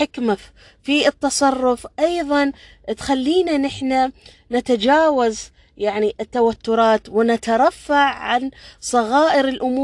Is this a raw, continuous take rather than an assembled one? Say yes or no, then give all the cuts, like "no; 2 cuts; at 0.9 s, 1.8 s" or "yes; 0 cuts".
yes; 0 cuts